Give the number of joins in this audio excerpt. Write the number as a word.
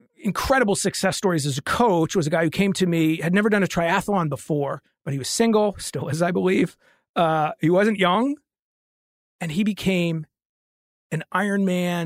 zero